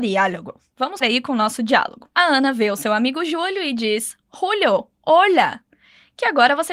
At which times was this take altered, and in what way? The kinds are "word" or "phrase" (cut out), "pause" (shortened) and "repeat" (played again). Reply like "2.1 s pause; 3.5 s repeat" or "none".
1.0 s word; 2.1 s pause